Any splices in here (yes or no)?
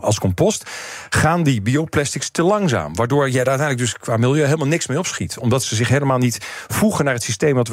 no